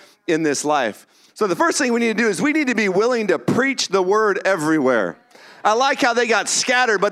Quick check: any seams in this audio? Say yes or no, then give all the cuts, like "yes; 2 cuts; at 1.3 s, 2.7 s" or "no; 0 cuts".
no; 0 cuts